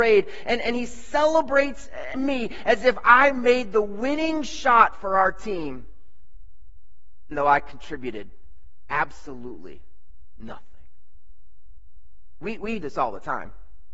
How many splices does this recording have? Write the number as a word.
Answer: three